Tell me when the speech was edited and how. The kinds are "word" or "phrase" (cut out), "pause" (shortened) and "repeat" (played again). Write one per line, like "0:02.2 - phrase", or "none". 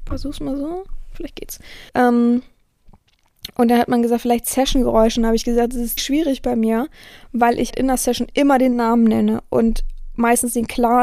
0:01.9 - pause
0:06.0 - word
0:07.7 - word